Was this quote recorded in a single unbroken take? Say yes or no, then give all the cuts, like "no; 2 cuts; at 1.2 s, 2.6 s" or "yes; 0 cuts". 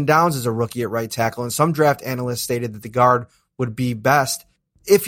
yes; 0 cuts